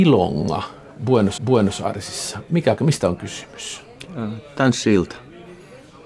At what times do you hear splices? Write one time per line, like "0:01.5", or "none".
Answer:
0:01.4
0:02.8